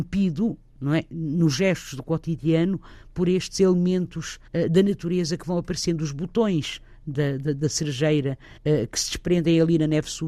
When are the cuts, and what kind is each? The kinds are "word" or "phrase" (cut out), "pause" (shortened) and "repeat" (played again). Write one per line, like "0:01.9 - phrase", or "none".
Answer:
0:04.5 - pause
0:08.6 - pause